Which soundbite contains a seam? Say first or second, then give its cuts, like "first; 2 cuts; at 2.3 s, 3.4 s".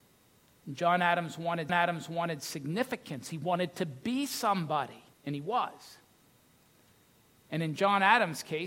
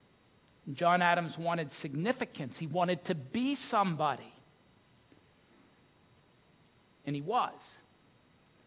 first; 2 cuts; at 1.7 s, 5.1 s